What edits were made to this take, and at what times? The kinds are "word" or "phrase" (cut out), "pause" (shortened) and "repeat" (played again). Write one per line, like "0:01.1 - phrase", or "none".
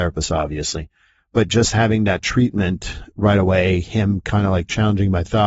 none